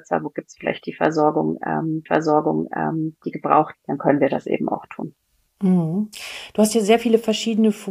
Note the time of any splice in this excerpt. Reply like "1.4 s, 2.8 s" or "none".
2.1 s, 3.7 s, 5.2 s

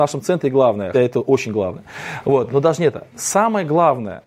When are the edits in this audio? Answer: 0.9 s, 2.5 s

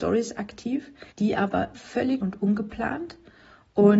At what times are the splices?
1.1 s, 1.7 s, 2.2 s

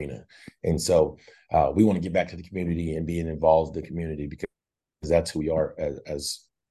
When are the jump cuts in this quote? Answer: none

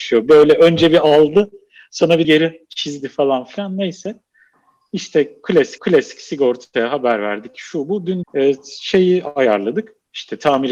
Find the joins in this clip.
2.2 s, 5.8 s, 8.2 s

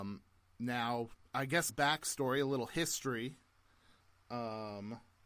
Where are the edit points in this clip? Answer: 1.2 s, 1.7 s

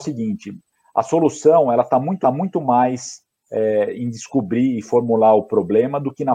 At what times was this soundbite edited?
2.2 s

